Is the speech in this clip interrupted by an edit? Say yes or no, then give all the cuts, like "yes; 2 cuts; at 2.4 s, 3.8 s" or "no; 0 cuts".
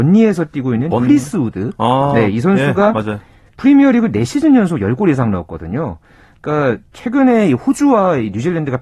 no; 0 cuts